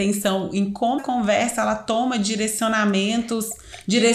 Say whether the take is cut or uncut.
cut